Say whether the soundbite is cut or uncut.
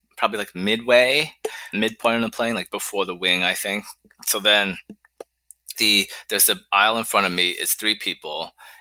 cut